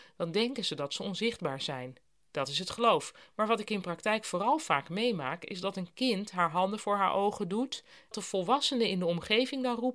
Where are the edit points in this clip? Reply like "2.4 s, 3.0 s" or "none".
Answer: 2.1 s, 8.1 s